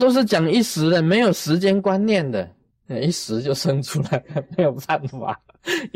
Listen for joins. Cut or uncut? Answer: cut